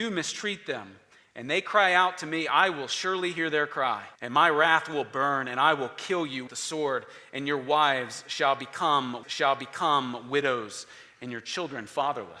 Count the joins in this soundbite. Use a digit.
3